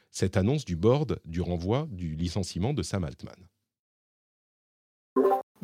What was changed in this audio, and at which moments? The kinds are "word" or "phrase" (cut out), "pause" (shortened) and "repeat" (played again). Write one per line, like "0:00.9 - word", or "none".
none